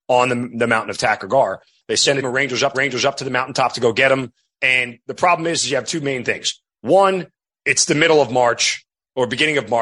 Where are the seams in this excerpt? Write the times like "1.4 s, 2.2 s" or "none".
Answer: 2.2 s, 2.7 s